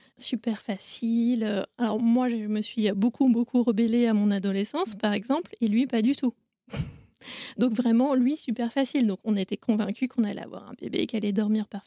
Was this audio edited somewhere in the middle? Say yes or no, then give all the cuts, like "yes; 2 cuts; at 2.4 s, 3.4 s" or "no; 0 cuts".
no; 0 cuts